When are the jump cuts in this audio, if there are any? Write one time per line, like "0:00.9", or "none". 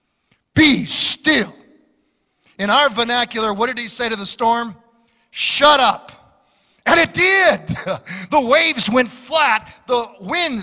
none

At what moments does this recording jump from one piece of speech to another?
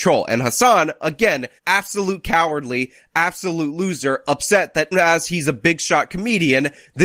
0:01.6
0:04.9

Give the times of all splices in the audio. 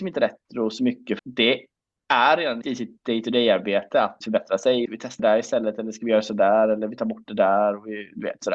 0:01.2
0:02.6
0:04.2
0:04.9
0:05.2

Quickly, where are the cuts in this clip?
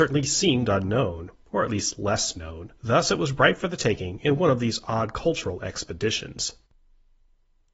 0:02.8

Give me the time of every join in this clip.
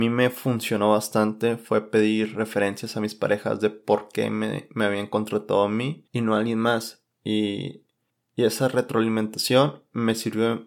0:06.1
0:08.1

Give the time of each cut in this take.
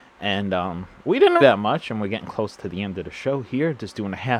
0:01.4

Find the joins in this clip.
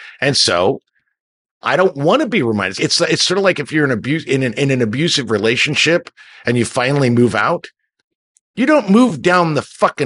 0:02.7

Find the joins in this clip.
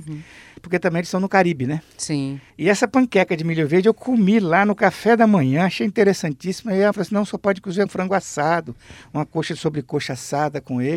0:02.5
0:06.9
0:07.9

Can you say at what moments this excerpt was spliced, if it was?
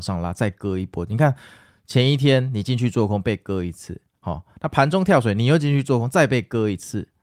none

